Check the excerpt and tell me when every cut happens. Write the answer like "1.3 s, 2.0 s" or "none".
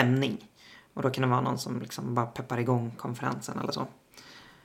none